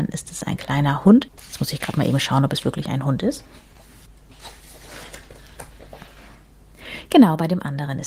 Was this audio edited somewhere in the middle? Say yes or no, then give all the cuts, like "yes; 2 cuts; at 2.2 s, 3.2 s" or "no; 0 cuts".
yes; 1 cut; at 1.4 s